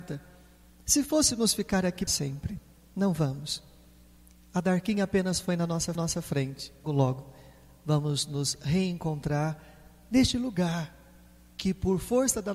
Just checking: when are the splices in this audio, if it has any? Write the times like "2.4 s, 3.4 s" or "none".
2.1 s, 6.0 s, 6.8 s